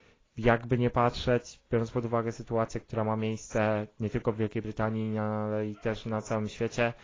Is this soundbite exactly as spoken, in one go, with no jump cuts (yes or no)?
yes